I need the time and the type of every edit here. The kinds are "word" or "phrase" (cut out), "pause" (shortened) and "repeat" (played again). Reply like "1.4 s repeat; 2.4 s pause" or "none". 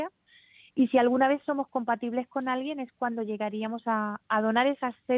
none